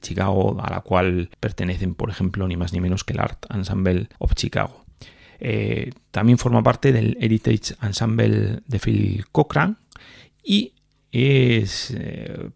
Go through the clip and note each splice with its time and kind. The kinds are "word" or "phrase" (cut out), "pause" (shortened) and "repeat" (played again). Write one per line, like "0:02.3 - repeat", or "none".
0:01.3 - pause
0:04.2 - pause

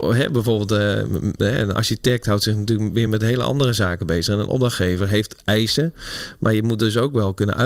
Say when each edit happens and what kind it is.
none

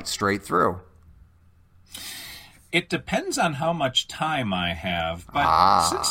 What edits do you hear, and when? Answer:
none

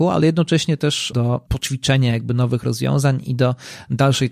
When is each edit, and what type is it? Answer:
0:01.1 - word
0:01.5 - word

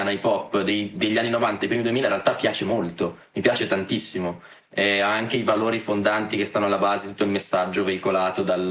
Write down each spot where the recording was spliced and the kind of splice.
none

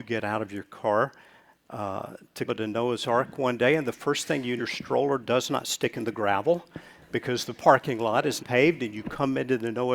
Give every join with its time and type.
0:02.5 - word
0:04.6 - word
0:08.4 - word

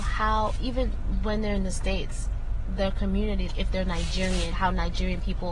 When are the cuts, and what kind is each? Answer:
0:03.5 - word
0:04.5 - word

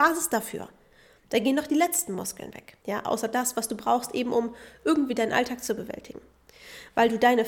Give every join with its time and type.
0:02.8 - pause

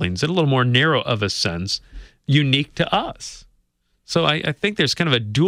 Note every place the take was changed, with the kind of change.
none

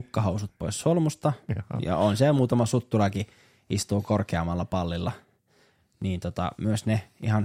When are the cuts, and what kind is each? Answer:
none

